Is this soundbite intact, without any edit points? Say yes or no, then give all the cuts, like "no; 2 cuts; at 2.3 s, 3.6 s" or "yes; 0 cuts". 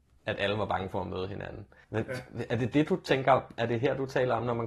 no; 1 cut; at 1.8 s